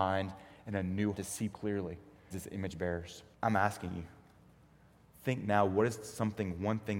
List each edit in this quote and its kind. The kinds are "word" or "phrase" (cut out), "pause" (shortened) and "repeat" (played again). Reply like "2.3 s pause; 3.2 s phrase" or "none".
1.1 s word; 1.5 s word; 2.3 s word; 3.3 s pause